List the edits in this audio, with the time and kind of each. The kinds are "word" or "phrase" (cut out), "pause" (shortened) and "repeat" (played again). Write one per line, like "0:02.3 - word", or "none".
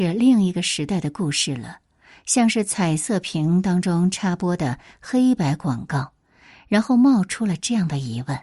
none